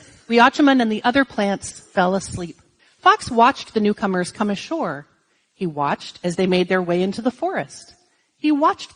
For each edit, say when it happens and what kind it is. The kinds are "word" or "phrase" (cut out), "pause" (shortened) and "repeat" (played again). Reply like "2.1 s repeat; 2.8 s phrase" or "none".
2.8 s pause

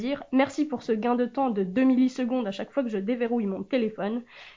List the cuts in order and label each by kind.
none

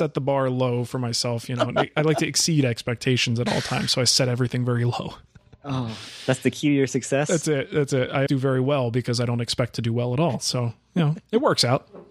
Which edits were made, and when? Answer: 8.3 s phrase

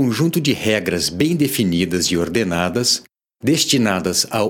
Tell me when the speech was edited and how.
none

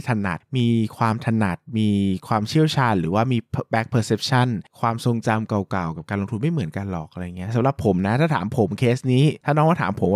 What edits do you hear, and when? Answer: none

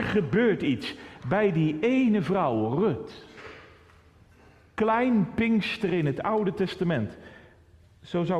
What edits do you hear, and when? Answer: none

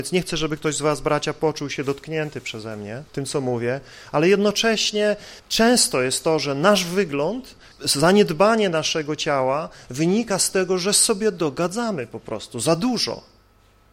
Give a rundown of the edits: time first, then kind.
3.1 s pause; 5.4 s pause

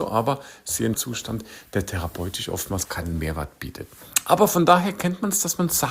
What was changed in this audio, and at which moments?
0.9 s word; 2.8 s word

